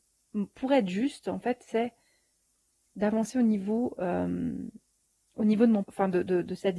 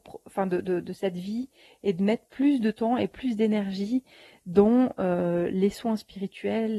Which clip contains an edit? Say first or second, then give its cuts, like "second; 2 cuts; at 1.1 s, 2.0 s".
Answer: first; 1 cut; at 5.8 s